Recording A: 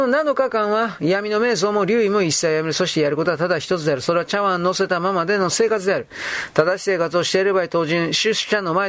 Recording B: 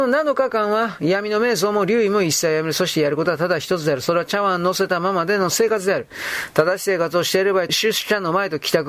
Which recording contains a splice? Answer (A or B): B